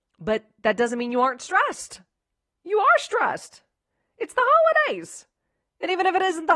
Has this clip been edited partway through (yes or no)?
no